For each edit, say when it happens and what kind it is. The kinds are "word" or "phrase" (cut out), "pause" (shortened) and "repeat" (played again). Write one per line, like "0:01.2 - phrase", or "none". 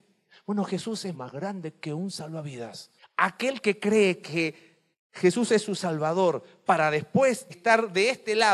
0:01.1 - word
0:03.0 - pause
0:04.9 - pause
0:07.5 - word